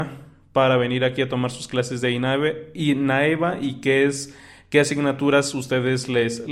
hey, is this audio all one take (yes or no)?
yes